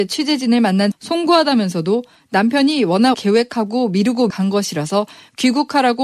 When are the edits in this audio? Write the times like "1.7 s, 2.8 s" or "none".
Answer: 0.9 s, 3.1 s, 4.3 s